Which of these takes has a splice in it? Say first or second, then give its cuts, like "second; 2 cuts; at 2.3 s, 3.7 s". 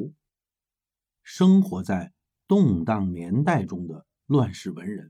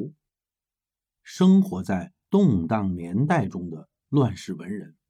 second; 1 cut; at 2.2 s